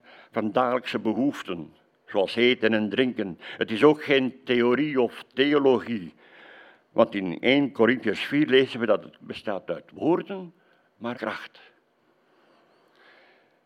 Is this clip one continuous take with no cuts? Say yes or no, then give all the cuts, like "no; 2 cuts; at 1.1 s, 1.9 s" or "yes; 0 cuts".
no; 2 cuts; at 9.2 s, 11.1 s